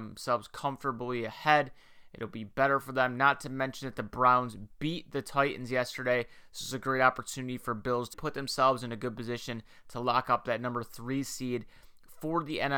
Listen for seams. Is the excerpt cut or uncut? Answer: cut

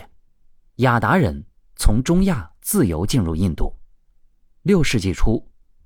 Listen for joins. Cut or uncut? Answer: uncut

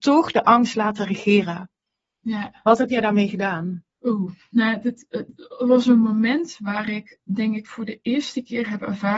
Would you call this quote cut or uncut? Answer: cut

